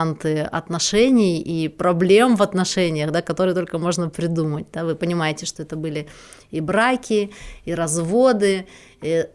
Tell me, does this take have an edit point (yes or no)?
no